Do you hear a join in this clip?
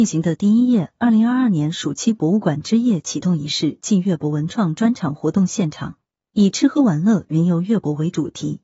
no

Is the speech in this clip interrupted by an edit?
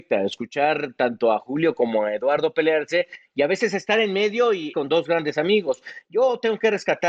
yes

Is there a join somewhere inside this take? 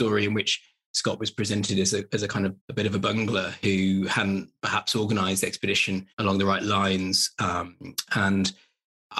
yes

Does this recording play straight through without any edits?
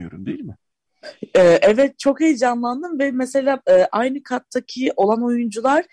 yes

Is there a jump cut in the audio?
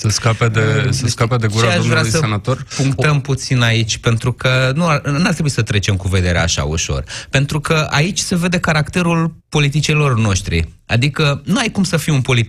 yes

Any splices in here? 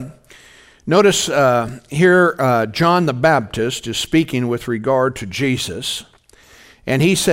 no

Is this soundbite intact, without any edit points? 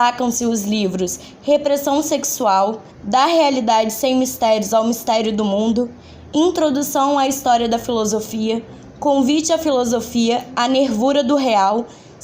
no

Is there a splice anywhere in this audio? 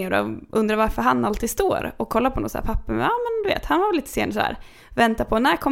no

